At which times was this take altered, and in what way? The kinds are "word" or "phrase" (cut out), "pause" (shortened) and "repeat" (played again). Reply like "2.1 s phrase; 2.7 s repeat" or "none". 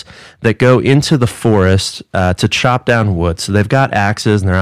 none